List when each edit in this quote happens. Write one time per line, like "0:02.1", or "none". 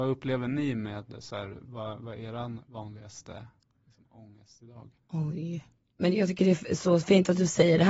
0:05.0